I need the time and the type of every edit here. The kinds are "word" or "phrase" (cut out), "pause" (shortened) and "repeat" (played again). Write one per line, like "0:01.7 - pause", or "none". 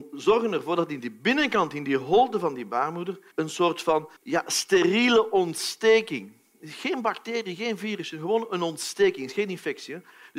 0:03.3 - pause
0:04.2 - pause